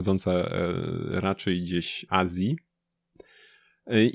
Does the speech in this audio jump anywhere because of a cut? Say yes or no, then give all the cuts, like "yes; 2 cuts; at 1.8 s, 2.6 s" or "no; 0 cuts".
yes; 1 cut; at 2.1 s